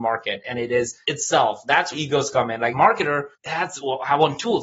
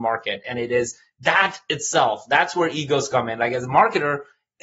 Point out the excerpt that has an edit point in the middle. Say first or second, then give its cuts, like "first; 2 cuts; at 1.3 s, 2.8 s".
first; 4 cuts; at 1.0 s, 1.9 s, 2.7 s, 3.3 s